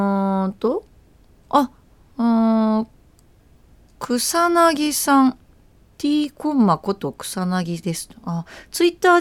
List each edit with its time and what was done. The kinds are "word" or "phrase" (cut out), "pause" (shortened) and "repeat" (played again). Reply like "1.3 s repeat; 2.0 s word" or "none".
none